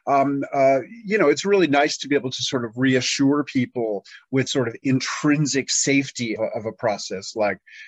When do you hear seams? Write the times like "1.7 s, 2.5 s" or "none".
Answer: 4.5 s, 6.4 s